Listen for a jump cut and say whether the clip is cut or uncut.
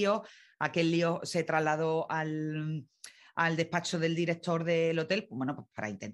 uncut